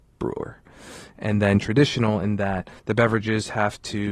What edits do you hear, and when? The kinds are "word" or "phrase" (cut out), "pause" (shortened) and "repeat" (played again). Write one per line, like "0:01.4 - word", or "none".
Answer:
0:02.8 - pause